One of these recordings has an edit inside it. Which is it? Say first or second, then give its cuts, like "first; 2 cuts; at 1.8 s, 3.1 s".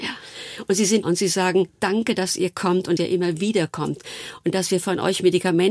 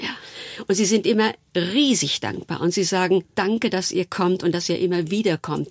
first; 2 cuts; at 1.0 s, 3.0 s